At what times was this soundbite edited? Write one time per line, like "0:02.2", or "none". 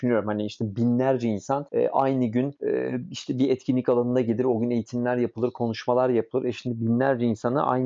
none